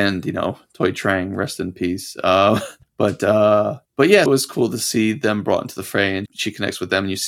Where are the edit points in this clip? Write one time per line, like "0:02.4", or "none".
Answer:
0:02.8
0:03.8
0:04.3
0:06.3